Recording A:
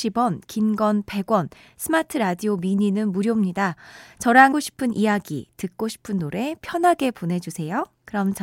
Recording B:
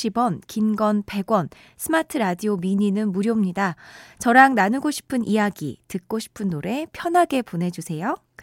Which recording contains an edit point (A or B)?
A